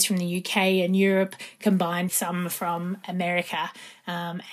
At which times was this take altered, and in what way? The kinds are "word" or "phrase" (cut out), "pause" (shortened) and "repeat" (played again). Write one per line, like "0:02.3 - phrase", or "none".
0:02.1 - word